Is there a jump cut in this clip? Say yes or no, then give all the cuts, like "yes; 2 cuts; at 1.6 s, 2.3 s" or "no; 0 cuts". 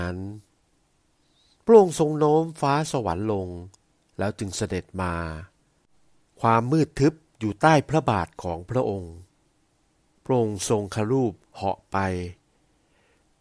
no; 0 cuts